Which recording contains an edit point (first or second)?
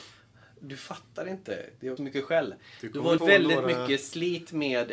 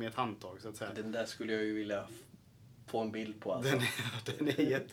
first